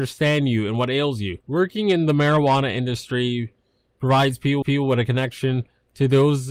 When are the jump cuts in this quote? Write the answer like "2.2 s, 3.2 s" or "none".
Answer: 1.4 s, 4.6 s